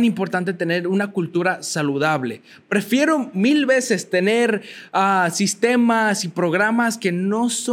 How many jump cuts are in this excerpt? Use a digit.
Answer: 0